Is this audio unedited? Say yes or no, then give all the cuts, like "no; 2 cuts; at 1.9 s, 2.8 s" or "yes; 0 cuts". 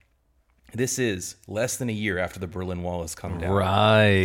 yes; 0 cuts